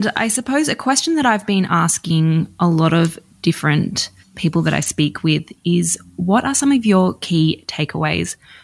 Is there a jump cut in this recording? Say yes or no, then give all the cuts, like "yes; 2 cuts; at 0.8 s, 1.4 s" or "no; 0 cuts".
yes; 1 cut; at 4.2 s